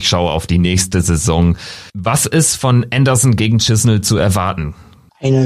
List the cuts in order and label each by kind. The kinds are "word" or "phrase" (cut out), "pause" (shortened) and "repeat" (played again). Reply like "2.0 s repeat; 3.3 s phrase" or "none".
1.9 s pause